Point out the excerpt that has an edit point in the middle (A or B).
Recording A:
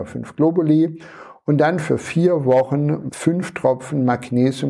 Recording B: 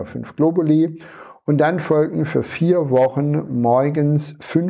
A